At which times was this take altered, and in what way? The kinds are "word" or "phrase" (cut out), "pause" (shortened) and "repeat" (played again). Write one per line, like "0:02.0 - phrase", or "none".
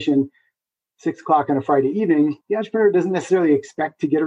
0:02.4 - pause